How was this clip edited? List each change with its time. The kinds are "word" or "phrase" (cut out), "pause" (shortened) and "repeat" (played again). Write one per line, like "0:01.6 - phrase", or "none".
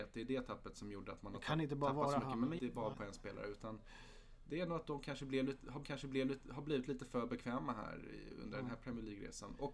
0:02.6 - phrase
0:02.9 - word
0:05.8 - repeat